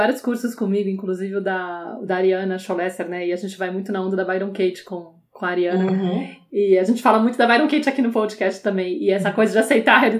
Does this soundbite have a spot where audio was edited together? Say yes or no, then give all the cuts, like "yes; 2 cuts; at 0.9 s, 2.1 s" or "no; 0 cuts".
no; 0 cuts